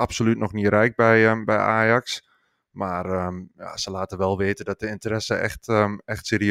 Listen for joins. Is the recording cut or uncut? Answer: uncut